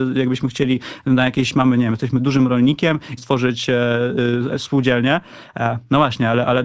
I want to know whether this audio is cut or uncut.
cut